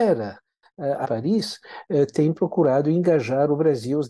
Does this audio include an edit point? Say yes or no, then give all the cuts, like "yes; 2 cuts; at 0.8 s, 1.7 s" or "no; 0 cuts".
yes; 1 cut; at 1.0 s